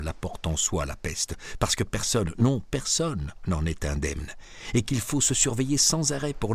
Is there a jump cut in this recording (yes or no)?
no